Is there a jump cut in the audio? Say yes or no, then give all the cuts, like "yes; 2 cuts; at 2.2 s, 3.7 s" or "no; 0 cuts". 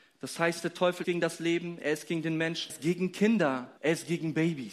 yes; 3 cuts; at 1.0 s, 2.7 s, 3.8 s